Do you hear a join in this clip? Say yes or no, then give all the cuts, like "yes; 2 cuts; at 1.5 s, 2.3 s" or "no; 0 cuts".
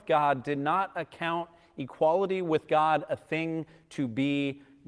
no; 0 cuts